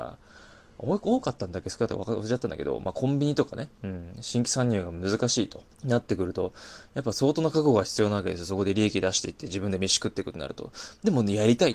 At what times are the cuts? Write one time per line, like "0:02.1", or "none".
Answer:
0:03.7
0:05.7